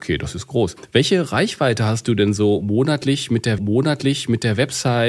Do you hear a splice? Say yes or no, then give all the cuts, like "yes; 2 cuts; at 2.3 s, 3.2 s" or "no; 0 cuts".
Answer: yes; 1 cut; at 3.6 s